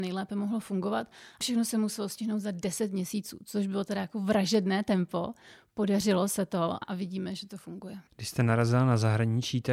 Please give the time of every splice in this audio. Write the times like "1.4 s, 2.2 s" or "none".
1.4 s, 6.8 s, 8.1 s